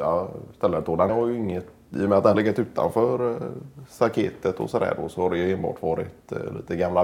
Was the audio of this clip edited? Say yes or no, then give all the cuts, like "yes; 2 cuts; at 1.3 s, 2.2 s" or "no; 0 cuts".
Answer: yes; 2 cuts; at 1.1 s, 2.3 s